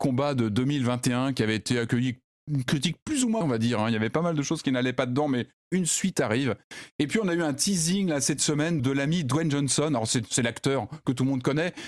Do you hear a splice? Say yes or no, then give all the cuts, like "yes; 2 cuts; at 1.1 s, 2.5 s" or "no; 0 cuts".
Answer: yes; 2 cuts; at 3.4 s, 8.8 s